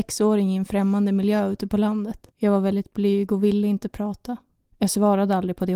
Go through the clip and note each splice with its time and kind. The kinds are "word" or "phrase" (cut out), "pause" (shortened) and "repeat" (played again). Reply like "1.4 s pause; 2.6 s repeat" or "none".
2.3 s pause